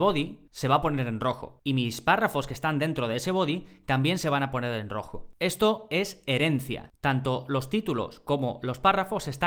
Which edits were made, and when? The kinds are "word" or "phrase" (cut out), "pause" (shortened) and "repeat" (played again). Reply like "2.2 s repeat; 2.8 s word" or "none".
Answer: none